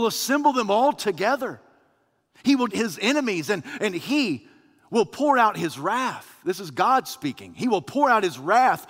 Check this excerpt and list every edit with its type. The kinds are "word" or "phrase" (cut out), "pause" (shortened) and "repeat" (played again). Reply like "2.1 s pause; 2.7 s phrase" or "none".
2.7 s word